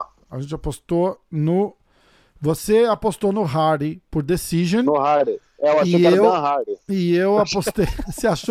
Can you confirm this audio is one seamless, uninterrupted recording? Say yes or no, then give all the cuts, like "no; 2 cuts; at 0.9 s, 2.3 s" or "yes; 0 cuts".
yes; 0 cuts